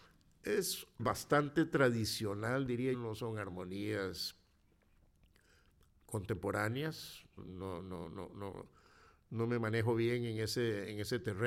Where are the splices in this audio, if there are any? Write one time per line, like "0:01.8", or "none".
0:01.0
0:02.9
0:07.4